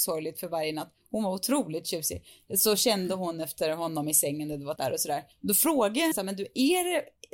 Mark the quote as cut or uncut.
cut